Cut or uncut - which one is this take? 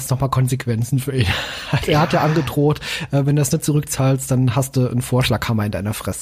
uncut